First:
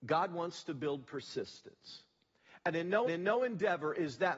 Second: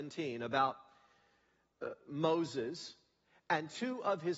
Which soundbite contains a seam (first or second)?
first